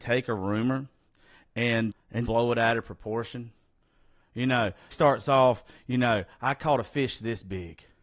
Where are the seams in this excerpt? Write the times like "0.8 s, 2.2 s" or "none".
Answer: 1.9 s, 2.3 s, 4.9 s